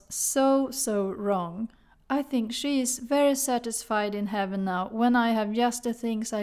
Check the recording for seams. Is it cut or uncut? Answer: uncut